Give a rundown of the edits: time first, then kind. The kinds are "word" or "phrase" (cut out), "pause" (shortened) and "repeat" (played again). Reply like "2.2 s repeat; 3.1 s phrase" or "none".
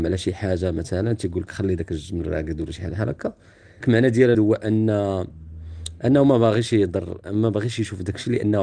3.8 s word; 4.3 s word

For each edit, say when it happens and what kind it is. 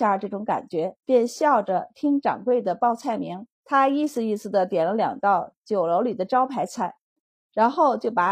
1.0 s pause; 3.5 s pause

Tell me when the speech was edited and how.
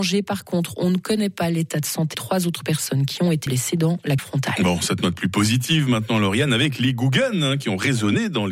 2.1 s word; 3.5 s word; 4.2 s word

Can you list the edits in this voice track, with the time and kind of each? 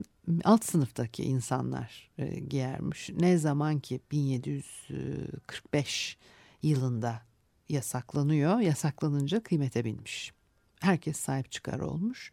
none

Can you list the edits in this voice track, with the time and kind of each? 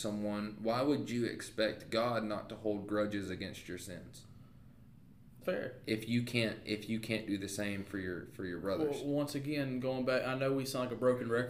5.4 s word

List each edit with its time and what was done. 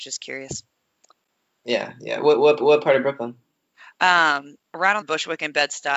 2.6 s repeat; 4.6 s pause; 5.0 s phrase

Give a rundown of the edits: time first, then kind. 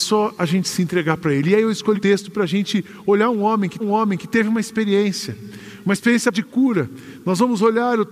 2.0 s word; 3.8 s repeat; 6.3 s word

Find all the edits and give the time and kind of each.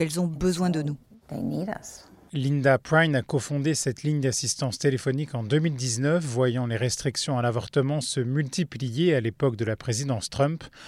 none

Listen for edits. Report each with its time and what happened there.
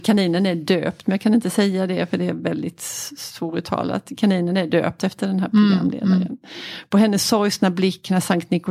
none

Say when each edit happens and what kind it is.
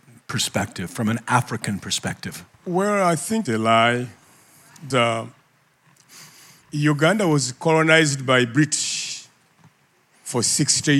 2.5 s pause; 3.5 s word; 4.9 s word

